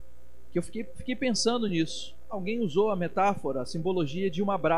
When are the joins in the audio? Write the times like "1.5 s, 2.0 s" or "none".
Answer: none

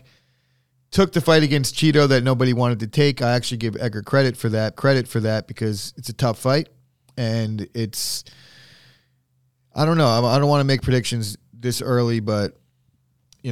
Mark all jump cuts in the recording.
4.7 s

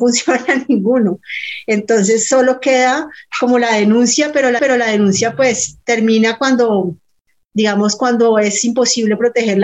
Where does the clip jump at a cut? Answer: 4.6 s

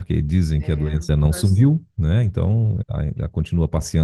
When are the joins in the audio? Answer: 1.1 s, 2.8 s

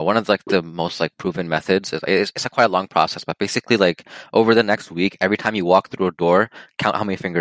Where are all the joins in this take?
none

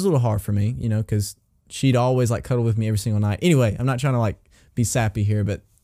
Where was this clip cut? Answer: none

